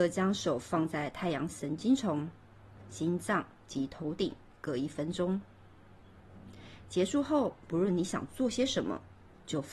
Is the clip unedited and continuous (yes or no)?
yes